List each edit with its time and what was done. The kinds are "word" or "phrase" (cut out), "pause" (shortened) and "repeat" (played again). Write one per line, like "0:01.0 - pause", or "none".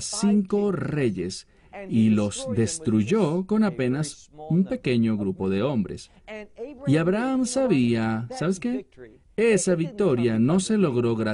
none